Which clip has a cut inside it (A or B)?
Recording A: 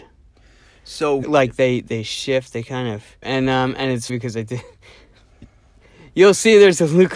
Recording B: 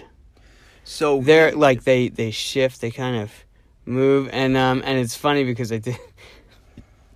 A